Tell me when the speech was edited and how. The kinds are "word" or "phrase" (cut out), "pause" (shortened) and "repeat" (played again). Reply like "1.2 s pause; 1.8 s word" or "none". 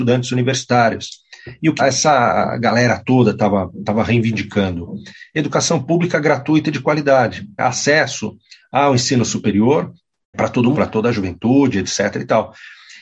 1.8 s phrase; 7.6 s word; 10.3 s word; 10.7 s word